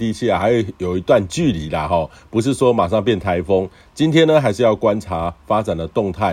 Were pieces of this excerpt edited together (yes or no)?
no